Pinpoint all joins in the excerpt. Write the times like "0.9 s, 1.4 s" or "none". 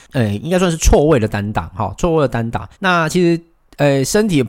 2.7 s